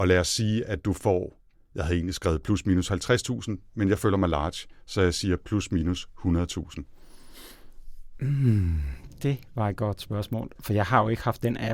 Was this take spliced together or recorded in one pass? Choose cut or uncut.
uncut